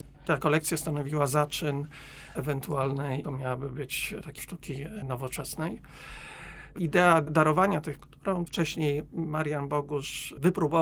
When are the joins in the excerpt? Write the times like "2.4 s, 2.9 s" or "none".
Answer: 2.3 s, 3.2 s, 4.4 s, 6.8 s, 8.0 s, 8.5 s